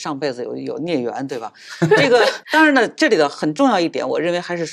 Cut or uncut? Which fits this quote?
cut